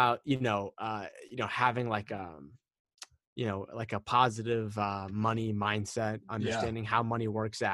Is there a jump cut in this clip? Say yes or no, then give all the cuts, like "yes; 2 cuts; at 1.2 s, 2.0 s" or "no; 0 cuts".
no; 0 cuts